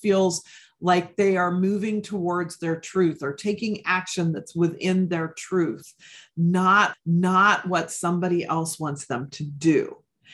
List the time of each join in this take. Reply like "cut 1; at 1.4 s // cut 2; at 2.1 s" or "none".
cut 1; at 6.9 s